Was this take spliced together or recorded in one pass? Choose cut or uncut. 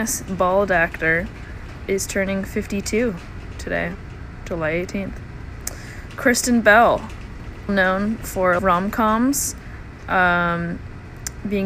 cut